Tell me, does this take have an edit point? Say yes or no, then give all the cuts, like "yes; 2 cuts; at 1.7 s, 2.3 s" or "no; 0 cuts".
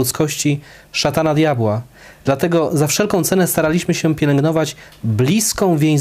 no; 0 cuts